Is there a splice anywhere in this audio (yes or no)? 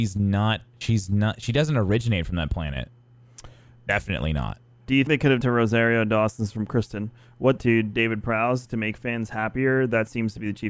yes